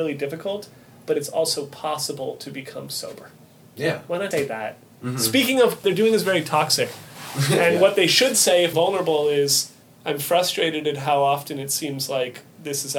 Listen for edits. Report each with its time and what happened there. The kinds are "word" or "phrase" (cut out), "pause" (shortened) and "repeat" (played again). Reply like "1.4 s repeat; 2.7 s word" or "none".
4.3 s word; 5.8 s phrase; 8.7 s phrase; 9.8 s pause

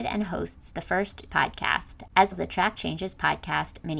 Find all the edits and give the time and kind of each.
1.3 s word; 2.3 s word

